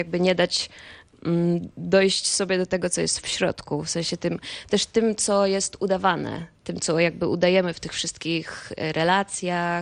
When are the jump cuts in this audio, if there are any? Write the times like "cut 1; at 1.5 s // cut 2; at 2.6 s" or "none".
none

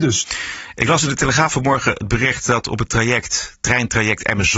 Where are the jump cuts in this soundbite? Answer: none

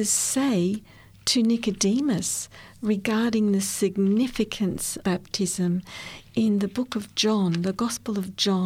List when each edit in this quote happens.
cut 1; at 5.0 s

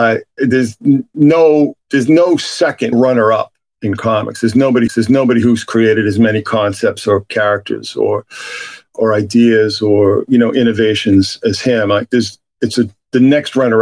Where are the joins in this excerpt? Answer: cut 1; at 2.9 s // cut 2; at 4.9 s // cut 3; at 12.5 s

